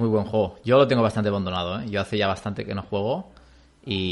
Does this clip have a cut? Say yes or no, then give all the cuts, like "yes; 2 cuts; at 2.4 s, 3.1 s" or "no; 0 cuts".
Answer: no; 0 cuts